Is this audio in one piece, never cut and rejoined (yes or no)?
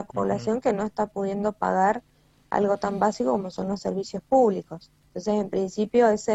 no